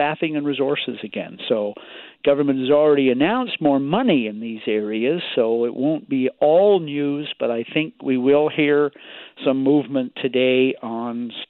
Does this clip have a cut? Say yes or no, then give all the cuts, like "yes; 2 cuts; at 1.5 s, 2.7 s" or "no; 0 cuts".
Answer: no; 0 cuts